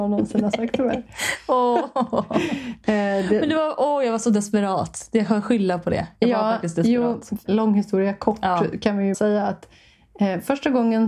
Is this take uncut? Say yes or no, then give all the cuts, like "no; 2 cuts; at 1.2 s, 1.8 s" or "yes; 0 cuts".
no; 2 cuts; at 7.5 s, 9.1 s